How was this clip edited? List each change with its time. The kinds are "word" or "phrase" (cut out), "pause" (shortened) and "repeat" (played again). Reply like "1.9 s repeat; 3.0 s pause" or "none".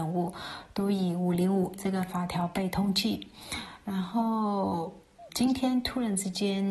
1.8 s word; 5.3 s word